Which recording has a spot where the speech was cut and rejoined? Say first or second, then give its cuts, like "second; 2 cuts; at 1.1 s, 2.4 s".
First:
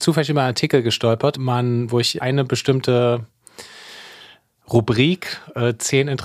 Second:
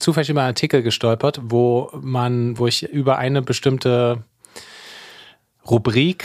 first; 2 cuts; at 1.3 s, 2.2 s